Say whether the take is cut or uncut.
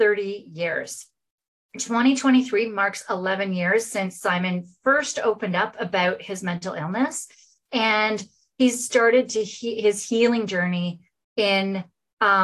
uncut